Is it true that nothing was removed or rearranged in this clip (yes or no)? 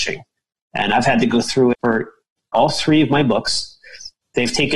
no